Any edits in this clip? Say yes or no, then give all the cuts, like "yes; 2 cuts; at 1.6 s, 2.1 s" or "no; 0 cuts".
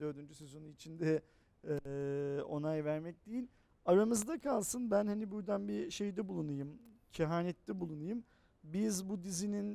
no; 0 cuts